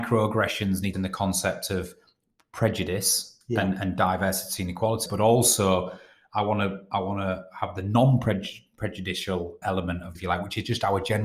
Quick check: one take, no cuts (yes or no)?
no